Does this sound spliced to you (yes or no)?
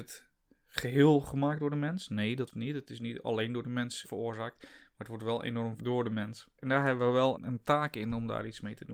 yes